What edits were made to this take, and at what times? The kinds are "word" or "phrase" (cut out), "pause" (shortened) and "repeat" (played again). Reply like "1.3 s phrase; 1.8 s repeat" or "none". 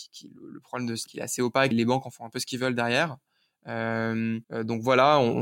1.1 s phrase; 1.7 s word; 4.4 s pause